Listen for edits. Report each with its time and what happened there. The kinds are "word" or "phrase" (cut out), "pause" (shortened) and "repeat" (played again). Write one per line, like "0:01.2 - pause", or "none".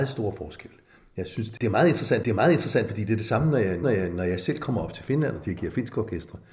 0:02.2 - repeat
0:03.8 - repeat